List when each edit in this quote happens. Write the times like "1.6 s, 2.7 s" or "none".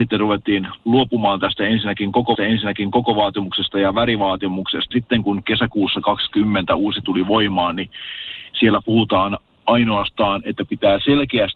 2.3 s, 4.9 s, 7.0 s